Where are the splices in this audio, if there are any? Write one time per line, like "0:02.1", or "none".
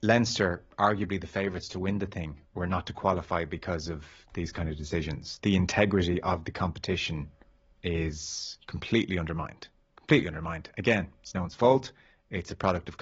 0:05.4